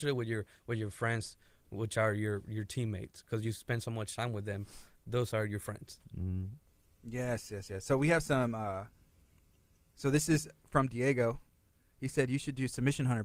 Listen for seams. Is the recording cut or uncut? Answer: uncut